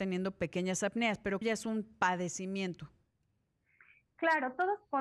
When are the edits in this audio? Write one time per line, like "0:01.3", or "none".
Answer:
0:01.4